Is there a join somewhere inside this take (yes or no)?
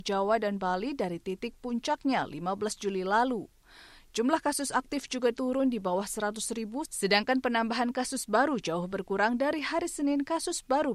no